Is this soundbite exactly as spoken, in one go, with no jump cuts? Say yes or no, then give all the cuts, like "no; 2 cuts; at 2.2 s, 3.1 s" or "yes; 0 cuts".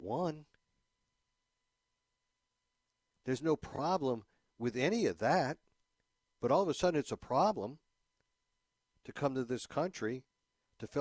yes; 0 cuts